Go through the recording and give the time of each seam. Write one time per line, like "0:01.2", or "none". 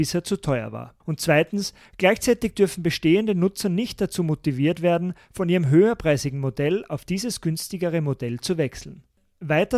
0:01.0